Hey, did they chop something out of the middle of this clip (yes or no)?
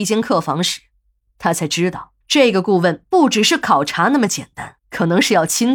yes